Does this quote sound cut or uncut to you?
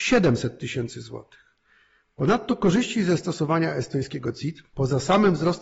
uncut